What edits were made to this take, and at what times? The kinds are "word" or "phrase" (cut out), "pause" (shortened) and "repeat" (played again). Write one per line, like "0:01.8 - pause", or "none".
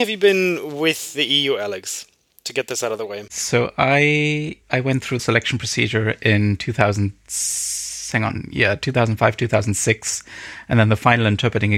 0:04.6 - pause
0:05.2 - phrase